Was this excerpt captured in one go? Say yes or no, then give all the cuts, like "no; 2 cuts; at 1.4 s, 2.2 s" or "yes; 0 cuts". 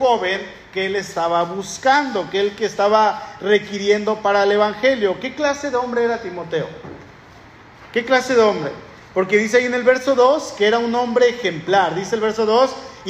yes; 0 cuts